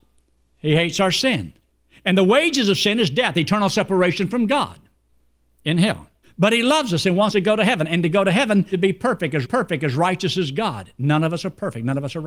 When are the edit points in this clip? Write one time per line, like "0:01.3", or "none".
0:01.7
0:06.2
0:07.3
0:08.7
0:09.4

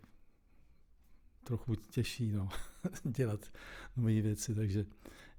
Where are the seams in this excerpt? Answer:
none

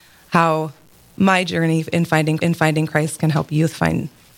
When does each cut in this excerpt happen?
0:02.4

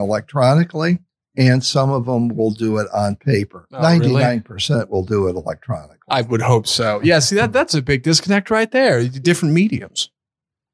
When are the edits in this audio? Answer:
0:01.1

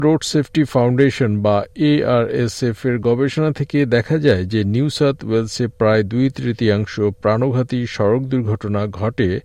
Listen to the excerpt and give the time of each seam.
none

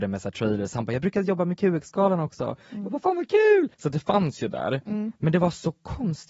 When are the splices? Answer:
0:03.7

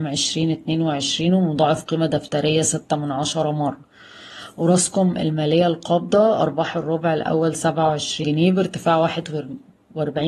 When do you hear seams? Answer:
0:08.2

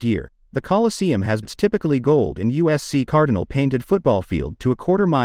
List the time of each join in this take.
0:01.4

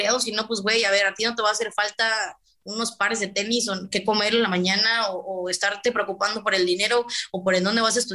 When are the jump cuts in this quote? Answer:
none

